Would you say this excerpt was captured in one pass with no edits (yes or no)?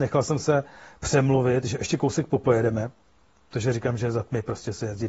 yes